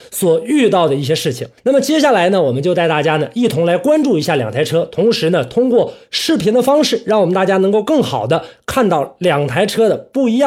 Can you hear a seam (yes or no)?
yes